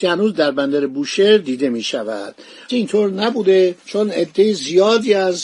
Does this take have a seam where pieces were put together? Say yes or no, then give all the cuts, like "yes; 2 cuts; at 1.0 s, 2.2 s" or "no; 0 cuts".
yes; 2 cuts; at 2.7 s, 3.8 s